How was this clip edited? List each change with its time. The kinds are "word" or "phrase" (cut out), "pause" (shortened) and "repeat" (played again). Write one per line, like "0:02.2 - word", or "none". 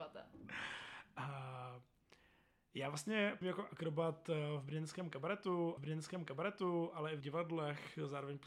0:03.4 - word
0:05.8 - repeat
0:07.2 - word

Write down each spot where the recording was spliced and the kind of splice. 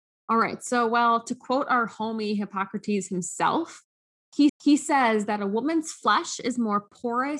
0:04.5 - repeat

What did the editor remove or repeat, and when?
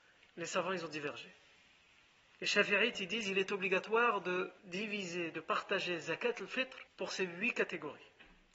0:04.6 - pause
0:06.9 - pause

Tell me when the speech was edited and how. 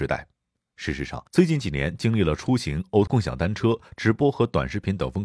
0:01.3 - pause
0:03.1 - word

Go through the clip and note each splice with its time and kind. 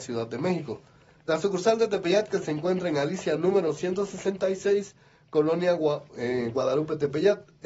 none

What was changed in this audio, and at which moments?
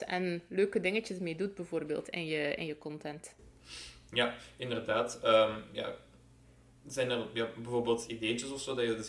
none

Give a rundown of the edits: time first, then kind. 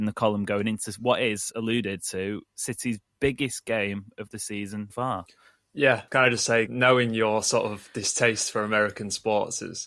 0:01.5 - word
0:04.9 - word
0:06.1 - word
0:06.7 - word

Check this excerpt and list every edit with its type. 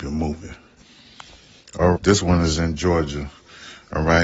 0:01.9 - word

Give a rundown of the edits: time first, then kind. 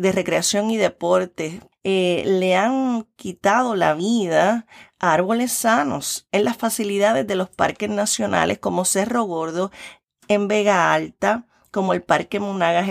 none

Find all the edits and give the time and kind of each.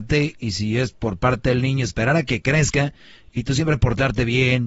none

